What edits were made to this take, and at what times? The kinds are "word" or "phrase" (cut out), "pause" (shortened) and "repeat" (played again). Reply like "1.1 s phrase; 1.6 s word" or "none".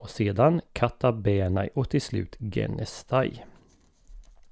none

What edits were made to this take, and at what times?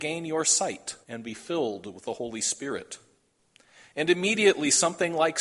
1.0 s pause

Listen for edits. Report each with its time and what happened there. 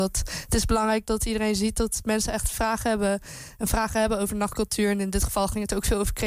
none

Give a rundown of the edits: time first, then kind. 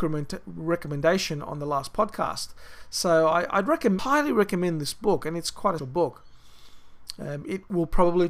4.0 s word; 5.8 s word

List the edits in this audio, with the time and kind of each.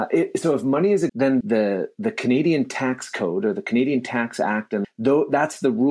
1.1 s word; 1.4 s word; 4.8 s word

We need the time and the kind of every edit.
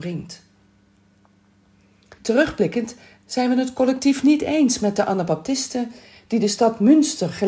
2.2 s pause

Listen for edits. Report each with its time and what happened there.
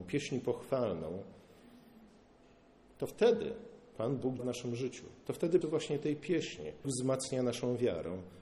4.4 s word; 5.6 s phrase; 6.8 s word

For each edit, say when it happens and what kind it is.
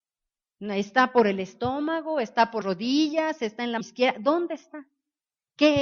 2.6 s word; 3.8 s word

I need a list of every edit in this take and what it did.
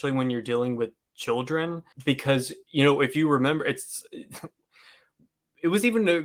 1.9 s pause

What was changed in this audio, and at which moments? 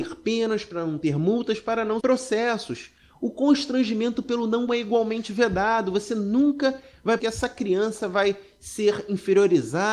2.0 s word; 4.7 s word; 7.2 s phrase

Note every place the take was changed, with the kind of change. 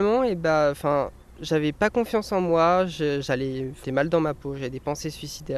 3.8 s word

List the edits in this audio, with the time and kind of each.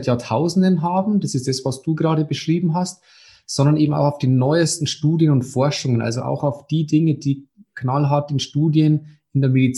none

